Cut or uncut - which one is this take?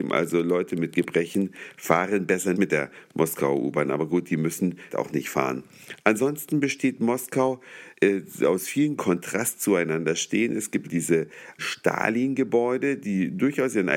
cut